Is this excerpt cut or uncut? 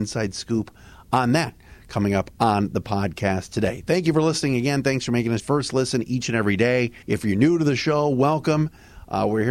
cut